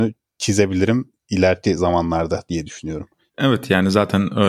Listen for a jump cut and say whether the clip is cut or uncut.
uncut